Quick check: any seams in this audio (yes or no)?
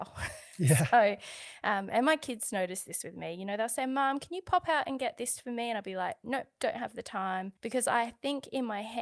yes